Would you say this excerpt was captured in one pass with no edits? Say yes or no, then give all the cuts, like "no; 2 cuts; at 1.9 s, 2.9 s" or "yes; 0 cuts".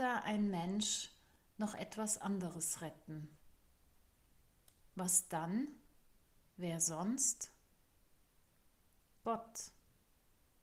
yes; 0 cuts